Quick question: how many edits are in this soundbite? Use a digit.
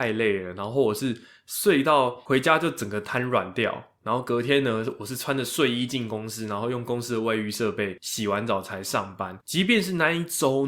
0